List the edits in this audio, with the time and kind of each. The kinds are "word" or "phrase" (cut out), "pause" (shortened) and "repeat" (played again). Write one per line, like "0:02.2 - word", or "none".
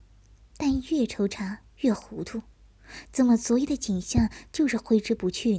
0:01.7 - pause